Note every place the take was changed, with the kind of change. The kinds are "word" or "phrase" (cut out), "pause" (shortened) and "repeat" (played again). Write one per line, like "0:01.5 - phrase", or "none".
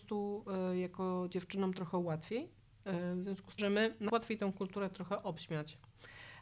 0:03.6 - word
0:04.1 - word